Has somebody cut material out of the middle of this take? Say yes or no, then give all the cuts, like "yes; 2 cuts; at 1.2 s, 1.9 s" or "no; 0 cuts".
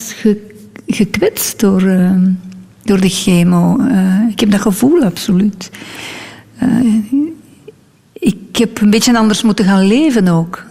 no; 0 cuts